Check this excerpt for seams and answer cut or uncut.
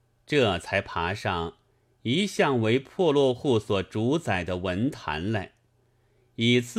uncut